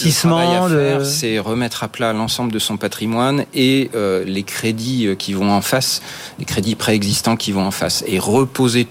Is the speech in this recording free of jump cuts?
yes; 0 cuts

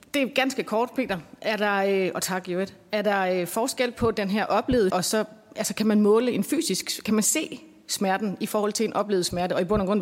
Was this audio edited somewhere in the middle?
yes; 1 cut; at 4.9 s

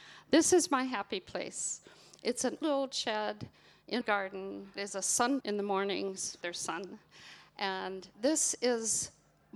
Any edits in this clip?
yes; 6 cuts; at 2.6 s, 4.0 s, 4.8 s, 5.4 s, 6.4 s, 8.1 s

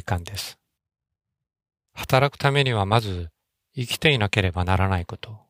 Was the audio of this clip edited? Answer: no; 0 cuts

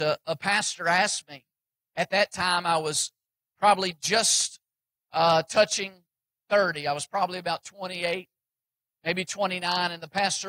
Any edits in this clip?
no; 0 cuts

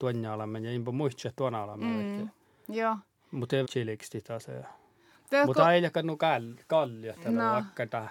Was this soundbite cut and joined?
yes; 1 cut; at 3.6 s

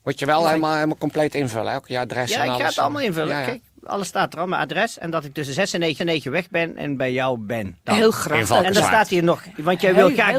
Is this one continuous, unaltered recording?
no; 1 cut; at 6.0 s

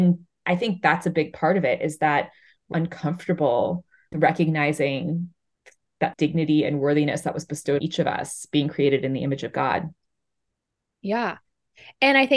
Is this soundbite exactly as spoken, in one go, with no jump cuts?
no; 4 cuts; at 2.7 s, 4.1 s, 6.1 s, 7.8 s

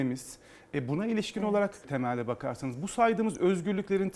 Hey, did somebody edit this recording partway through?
yes; 1 cut; at 1.8 s

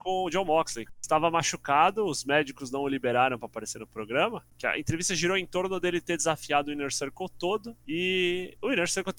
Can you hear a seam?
no; 0 cuts

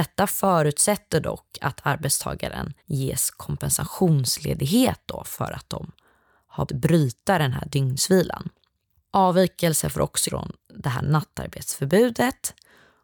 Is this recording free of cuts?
no; 3 cuts; at 2.8 s, 6.7 s, 10.3 s

